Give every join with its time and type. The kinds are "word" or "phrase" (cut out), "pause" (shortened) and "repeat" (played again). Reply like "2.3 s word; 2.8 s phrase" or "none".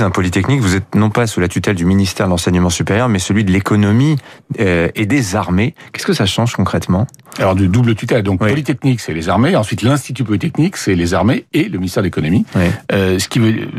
none